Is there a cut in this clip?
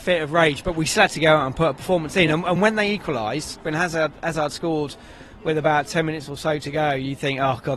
no; 0 cuts

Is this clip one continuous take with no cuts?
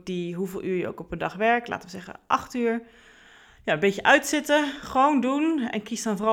yes; 0 cuts

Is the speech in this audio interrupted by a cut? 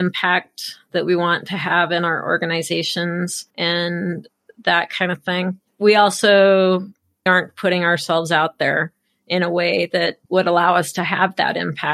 yes; 4 cuts; at 3.5 s, 5.7 s, 7.3 s, 10.2 s

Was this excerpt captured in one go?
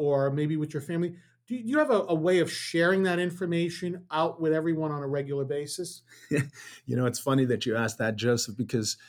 yes; 0 cuts

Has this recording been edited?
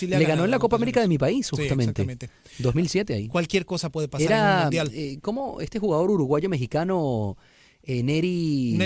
no; 0 cuts

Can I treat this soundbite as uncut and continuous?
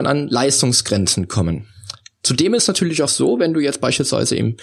yes; 0 cuts

